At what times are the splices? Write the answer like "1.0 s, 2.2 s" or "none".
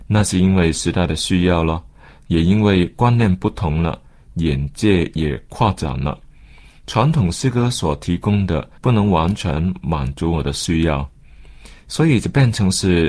8.8 s